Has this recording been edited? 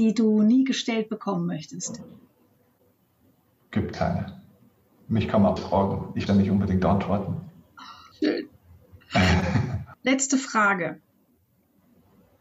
yes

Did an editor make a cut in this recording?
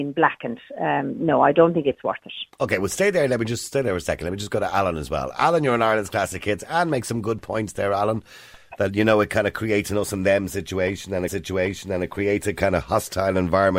yes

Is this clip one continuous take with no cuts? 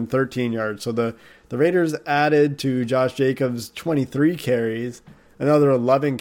yes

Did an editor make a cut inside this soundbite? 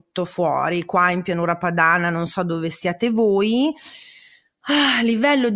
no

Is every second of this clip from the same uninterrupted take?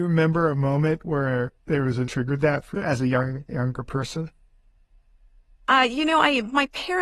no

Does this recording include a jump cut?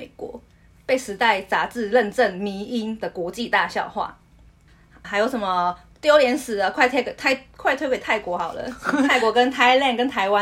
yes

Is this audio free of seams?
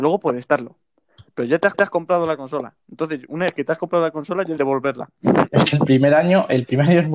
no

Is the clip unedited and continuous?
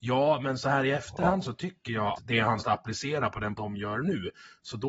no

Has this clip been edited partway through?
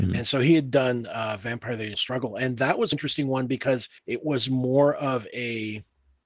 yes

